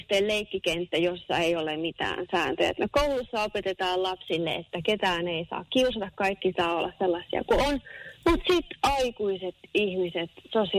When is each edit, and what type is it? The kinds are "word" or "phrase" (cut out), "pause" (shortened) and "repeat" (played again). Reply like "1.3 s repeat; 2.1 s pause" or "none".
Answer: 8.2 s pause